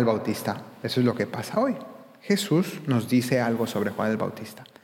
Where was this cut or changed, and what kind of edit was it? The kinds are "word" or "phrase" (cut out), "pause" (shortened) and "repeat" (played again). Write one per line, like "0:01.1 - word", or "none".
none

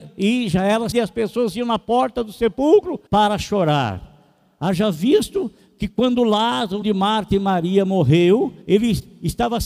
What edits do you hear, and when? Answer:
0:00.9 - word
0:03.1 - pause
0:06.8 - word
0:08.6 - pause

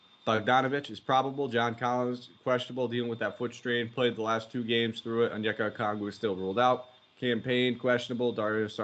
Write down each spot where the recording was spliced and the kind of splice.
none

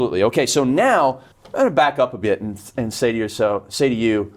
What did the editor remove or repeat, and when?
0:01.3 - pause

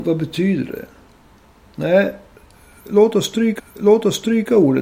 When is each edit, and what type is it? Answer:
0:03.6 - repeat

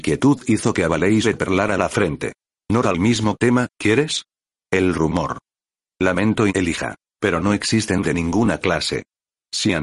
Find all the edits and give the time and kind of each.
0:01.2 - word
0:02.8 - word
0:06.5 - word
0:08.0 - word

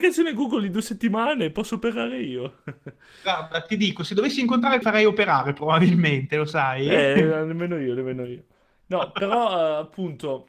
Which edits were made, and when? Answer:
0:04.8 - phrase

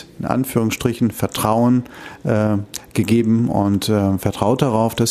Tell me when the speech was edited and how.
none

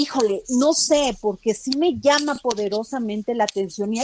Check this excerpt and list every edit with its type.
none

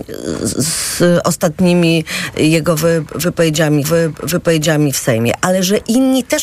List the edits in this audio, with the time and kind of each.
0:03.8 - repeat

